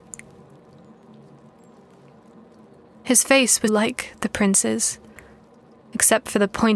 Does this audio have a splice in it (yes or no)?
yes